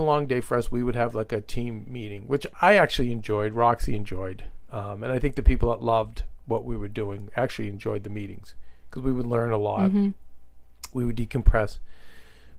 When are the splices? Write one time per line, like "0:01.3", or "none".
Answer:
none